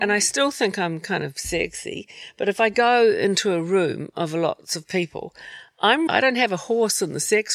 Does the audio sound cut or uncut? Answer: cut